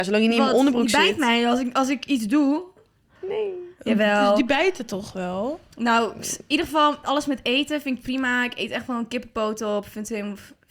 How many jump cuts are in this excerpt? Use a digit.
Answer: 1